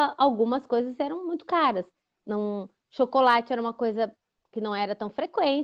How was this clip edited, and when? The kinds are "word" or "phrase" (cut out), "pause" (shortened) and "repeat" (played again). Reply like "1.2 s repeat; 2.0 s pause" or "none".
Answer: none